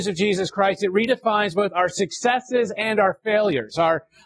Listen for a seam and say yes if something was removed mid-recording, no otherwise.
no